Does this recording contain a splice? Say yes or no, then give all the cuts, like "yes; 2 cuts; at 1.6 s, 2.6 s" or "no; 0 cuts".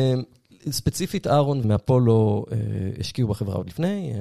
yes; 1 cut; at 1.6 s